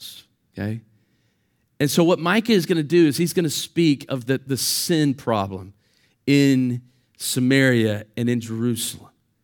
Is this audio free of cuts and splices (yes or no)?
yes